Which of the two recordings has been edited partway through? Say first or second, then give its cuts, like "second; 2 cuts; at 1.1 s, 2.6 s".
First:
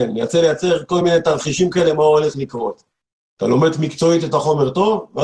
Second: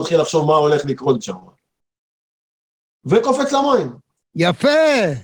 second; 2 cuts; at 1.2 s, 4.1 s